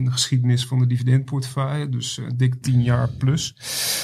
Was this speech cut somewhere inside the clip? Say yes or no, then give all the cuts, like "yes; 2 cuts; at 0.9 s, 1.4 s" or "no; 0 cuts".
no; 0 cuts